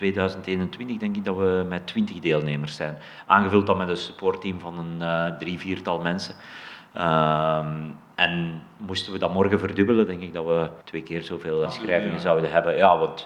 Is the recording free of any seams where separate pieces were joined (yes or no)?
no